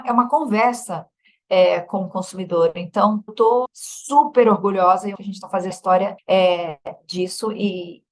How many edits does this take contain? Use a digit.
5